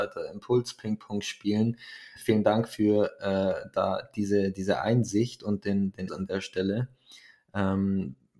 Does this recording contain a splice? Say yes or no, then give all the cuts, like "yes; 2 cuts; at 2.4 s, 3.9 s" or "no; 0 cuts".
yes; 2 cuts; at 2.2 s, 6.1 s